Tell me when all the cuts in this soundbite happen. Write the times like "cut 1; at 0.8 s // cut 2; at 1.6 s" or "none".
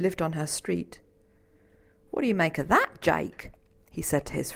none